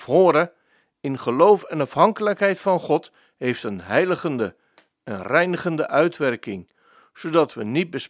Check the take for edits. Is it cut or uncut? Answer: uncut